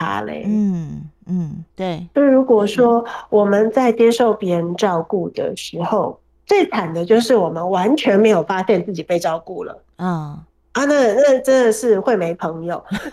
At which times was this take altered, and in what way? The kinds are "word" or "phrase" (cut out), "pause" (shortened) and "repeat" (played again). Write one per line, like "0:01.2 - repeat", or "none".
0:01.7 - pause
0:10.5 - pause